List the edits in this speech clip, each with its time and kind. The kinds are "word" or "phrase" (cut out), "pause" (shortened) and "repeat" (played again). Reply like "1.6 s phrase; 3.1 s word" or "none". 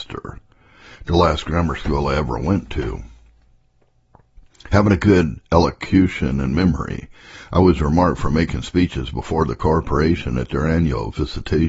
none